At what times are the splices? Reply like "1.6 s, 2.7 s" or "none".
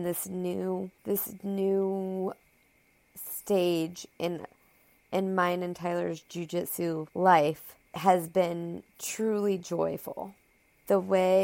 1.0 s, 8.9 s